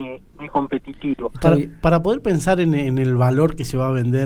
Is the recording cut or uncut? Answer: uncut